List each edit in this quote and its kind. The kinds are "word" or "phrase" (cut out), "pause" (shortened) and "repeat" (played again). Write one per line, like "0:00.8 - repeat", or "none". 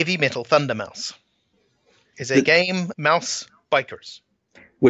0:02.1 - word
0:02.9 - word